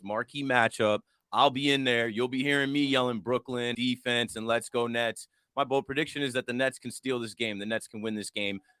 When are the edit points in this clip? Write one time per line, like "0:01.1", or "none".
0:03.7